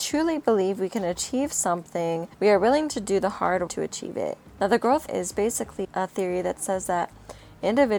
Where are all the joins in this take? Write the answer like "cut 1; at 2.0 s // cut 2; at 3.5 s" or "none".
cut 1; at 2.3 s // cut 2; at 3.7 s // cut 3; at 5.1 s // cut 4; at 5.8 s

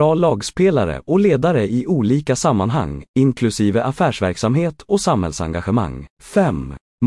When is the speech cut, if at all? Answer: cut 1; at 6.1 s

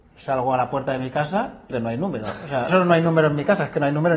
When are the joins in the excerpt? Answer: cut 1; at 1.7 s // cut 2; at 2.7 s

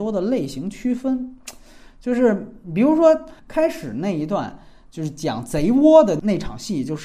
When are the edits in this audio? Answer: none

